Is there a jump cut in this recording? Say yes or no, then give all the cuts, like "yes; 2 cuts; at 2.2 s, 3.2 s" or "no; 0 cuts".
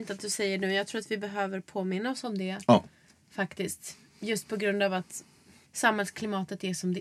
no; 0 cuts